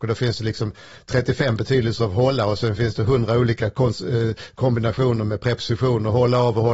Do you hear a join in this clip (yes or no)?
no